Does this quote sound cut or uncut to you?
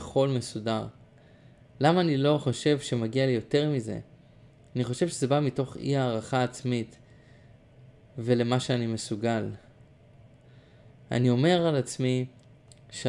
uncut